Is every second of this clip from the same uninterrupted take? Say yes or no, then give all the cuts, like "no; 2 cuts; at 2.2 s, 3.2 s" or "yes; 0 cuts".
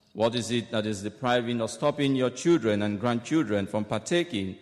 yes; 0 cuts